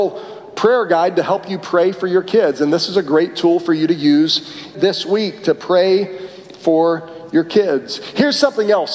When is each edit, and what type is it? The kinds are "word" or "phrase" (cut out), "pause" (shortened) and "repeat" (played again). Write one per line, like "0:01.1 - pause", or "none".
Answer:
0:04.7 - word